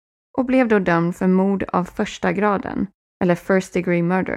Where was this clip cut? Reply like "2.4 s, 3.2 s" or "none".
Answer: none